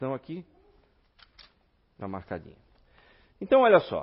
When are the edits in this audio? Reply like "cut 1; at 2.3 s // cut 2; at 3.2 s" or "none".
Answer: cut 1; at 2.0 s